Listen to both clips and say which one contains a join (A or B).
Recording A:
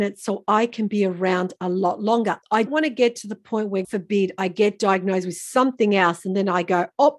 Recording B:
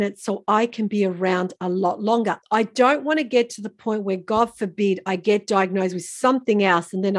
A